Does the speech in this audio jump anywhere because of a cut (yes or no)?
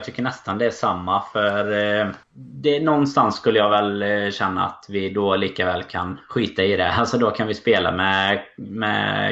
yes